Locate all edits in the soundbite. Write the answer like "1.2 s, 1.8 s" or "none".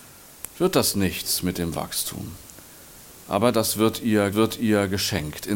4.3 s